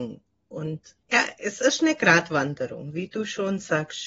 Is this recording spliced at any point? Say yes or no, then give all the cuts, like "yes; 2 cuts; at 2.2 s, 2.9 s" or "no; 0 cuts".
yes; 1 cut; at 1.0 s